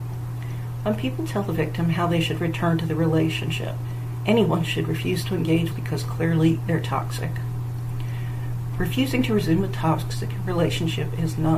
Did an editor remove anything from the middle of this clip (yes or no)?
yes